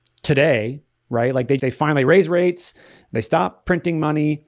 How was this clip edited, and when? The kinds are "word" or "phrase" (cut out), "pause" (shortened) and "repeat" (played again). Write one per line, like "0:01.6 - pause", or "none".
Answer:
0:01.6 - word